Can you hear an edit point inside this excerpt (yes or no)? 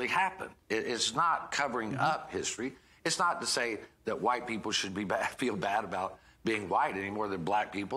no